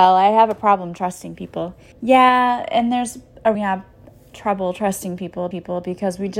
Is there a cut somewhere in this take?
yes; 3 cuts; at 1.9 s, 3.5 s, 5.5 s

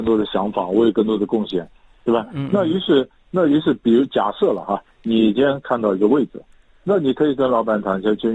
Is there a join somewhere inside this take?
no; 0 cuts

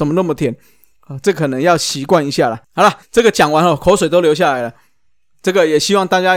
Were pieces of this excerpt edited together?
yes; 2 cuts; at 2.6 s, 3.0 s

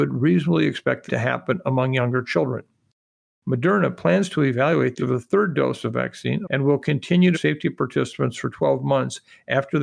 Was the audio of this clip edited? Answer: yes; 4 cuts; at 1.1 s, 5.0 s, 6.4 s, 7.3 s

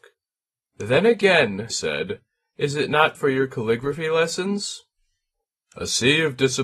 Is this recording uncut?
no; 2 cuts; at 1.7 s, 3.1 s

